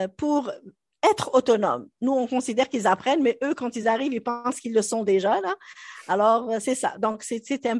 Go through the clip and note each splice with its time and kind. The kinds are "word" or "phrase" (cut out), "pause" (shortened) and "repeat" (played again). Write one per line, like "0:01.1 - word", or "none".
none

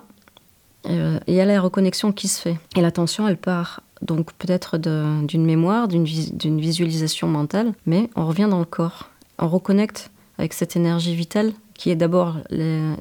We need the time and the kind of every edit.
0:02.7 - pause
0:03.9 - pause
0:07.8 - pause

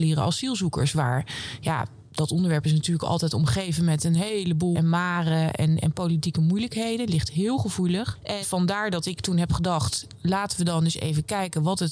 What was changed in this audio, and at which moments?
0:04.7 - word
0:05.8 - word
0:08.4 - word

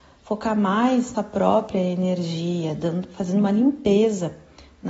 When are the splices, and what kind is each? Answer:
0:01.1 - phrase

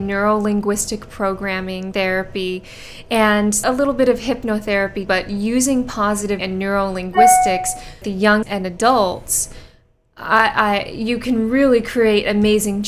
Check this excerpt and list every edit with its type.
0:01.9 - word
0:03.6 - word
0:05.1 - word
0:06.4 - word
0:08.0 - word
0:08.4 - word

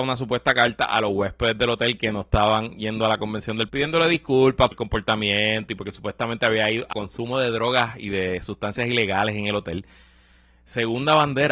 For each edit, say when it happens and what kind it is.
0:03.7 - word
0:04.7 - word
0:06.9 - word

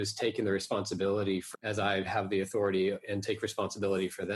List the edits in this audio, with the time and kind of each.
0:01.5 - word

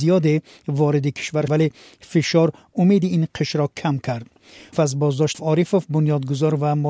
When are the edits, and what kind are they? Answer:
0:01.5 - word
0:04.7 - word
0:05.3 - word

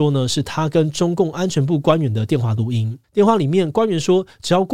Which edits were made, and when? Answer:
0:03.0 - pause

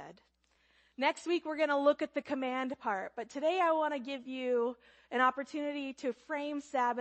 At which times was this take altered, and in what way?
none

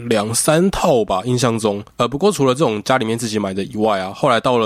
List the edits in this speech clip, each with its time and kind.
0:01.9 - pause

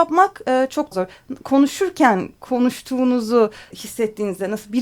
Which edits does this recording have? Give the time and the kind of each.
0:00.9 - word
0:03.7 - word

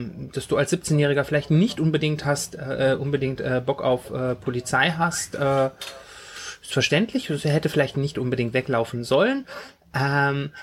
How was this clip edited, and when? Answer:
none

